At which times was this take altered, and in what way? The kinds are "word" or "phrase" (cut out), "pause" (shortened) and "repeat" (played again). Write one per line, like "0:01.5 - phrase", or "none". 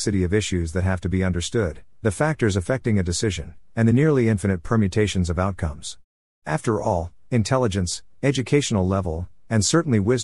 none